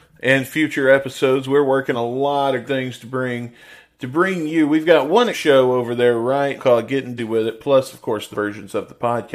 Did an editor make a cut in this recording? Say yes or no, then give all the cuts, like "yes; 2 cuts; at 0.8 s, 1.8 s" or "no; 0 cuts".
yes; 6 cuts; at 1.9 s, 2.6 s, 5.3 s, 6.6 s, 7.2 s, 8.3 s